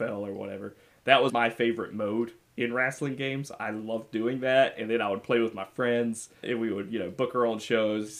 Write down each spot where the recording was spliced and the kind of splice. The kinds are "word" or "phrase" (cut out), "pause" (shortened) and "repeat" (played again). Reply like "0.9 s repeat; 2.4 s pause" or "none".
1.3 s word; 6.4 s word